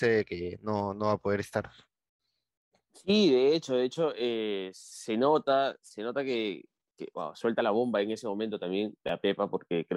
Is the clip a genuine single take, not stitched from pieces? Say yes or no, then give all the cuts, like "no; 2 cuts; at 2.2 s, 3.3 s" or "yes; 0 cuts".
yes; 0 cuts